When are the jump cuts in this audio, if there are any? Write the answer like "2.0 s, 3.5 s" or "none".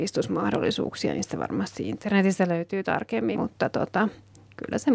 3.3 s